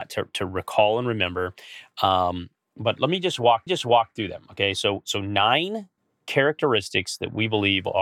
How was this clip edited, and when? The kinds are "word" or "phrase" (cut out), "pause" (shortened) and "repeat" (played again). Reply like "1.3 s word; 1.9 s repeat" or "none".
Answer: 3.7 s repeat; 6.0 s pause